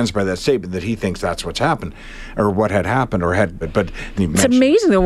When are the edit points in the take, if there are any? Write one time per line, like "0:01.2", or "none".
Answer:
0:03.6
0:04.2